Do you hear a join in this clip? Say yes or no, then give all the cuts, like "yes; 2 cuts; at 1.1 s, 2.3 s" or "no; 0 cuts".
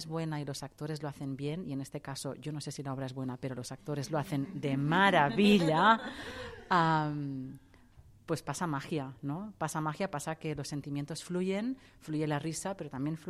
no; 0 cuts